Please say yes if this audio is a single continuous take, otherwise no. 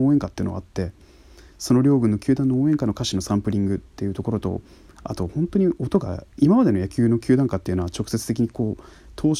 yes